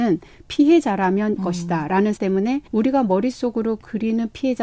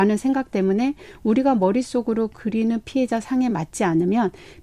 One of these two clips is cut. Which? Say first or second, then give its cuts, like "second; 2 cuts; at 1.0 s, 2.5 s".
first; 3 cuts; at 1.4 s, 2.2 s, 2.7 s